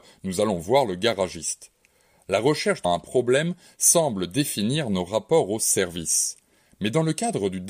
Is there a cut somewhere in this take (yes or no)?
yes